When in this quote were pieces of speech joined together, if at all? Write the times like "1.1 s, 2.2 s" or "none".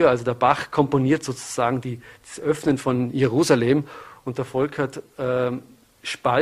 none